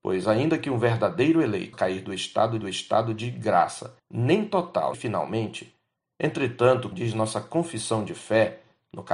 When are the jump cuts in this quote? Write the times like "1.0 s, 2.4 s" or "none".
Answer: 1.7 s, 2.6 s, 4.0 s, 4.9 s, 6.9 s